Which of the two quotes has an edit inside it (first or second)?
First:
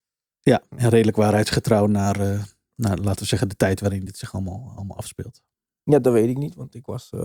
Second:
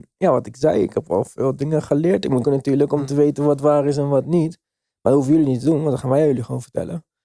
second